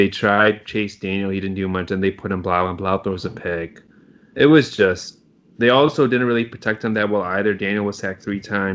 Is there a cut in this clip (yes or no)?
no